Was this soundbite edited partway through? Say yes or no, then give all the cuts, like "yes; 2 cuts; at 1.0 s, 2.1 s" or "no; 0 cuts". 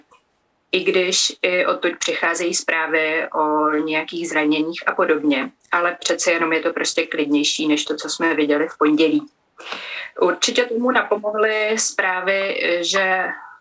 no; 0 cuts